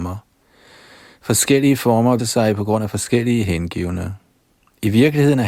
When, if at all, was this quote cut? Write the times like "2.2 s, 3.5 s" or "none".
2.2 s